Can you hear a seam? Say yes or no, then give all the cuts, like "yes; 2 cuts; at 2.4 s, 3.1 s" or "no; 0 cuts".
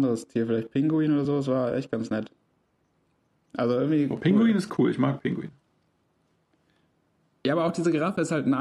no; 0 cuts